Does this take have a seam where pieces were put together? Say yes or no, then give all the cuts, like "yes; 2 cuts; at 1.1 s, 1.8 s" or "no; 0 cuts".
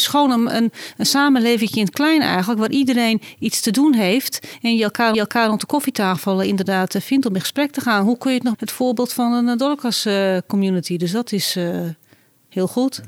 yes; 2 cuts; at 5.1 s, 8.5 s